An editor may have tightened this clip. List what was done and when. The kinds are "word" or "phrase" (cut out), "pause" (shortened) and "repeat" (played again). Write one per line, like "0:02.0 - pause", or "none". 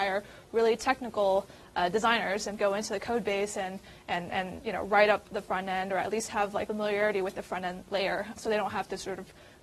0:02.6 - phrase
0:06.7 - word
0:08.4 - word